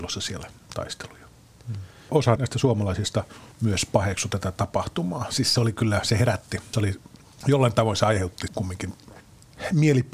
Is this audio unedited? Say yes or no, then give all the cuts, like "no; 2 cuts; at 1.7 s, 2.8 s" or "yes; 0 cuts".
no; 5 cuts; at 2.4 s, 3.5 s, 5.6 s, 7.2 s, 8.5 s